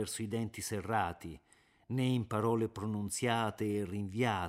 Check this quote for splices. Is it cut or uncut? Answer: uncut